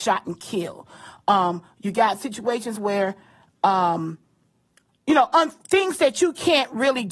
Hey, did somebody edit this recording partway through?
no; 0 cuts

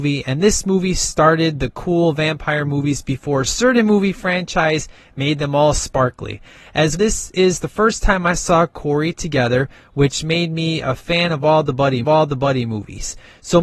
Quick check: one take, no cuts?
no; 2 cuts; at 7.0 s, 12.0 s

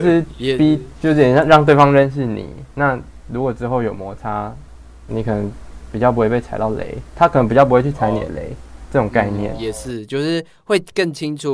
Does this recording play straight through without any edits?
yes; 0 cuts

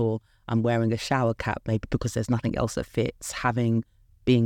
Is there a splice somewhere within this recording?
no; 0 cuts

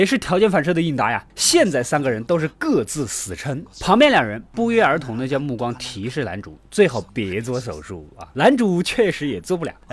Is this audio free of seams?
no; 1 cut; at 8.3 s

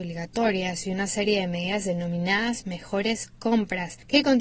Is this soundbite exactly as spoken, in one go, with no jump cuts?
yes; 0 cuts

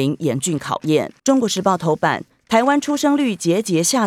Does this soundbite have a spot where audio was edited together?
yes; 1 cut; at 1.2 s

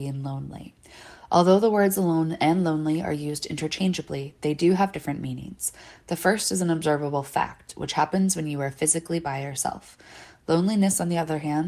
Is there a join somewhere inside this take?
no; 0 cuts

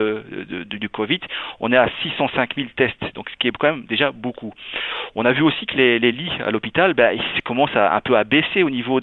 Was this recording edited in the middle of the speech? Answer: no; 0 cuts

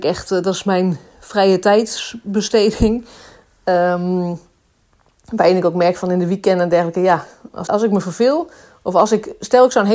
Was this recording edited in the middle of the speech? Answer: yes; 1 cut; at 7.7 s

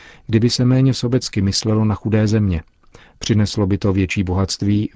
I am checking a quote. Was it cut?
no; 0 cuts

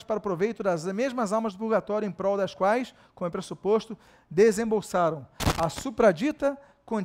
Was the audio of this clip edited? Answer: no; 0 cuts

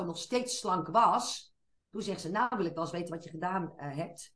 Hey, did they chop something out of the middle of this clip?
no; 0 cuts

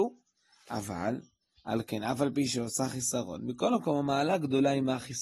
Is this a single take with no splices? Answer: yes; 0 cuts

